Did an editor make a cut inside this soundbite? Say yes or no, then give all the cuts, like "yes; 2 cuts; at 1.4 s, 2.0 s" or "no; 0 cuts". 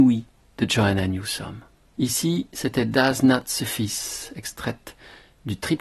no; 0 cuts